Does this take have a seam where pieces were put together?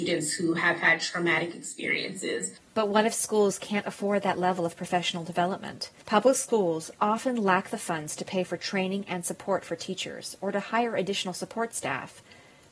yes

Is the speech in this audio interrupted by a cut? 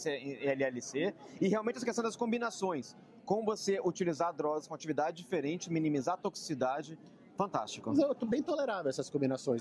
no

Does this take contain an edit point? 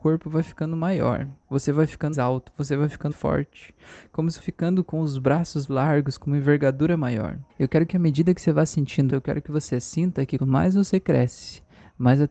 yes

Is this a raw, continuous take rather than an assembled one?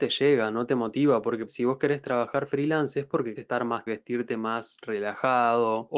no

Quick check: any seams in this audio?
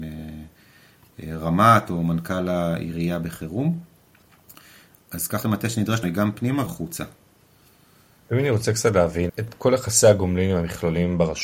yes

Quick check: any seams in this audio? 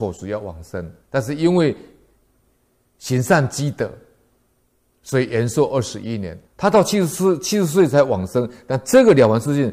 yes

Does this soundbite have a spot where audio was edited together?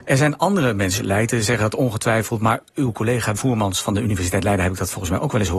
yes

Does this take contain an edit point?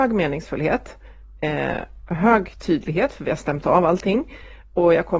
no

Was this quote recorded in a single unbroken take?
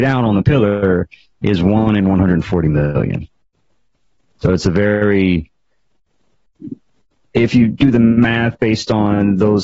yes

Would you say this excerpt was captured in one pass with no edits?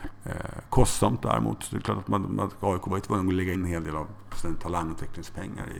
no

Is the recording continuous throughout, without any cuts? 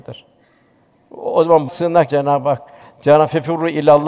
no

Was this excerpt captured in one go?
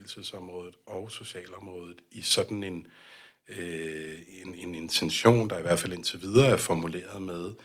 yes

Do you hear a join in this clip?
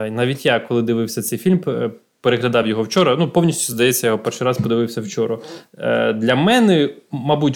no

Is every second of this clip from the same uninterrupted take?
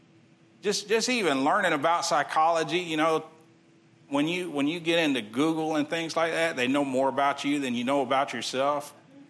yes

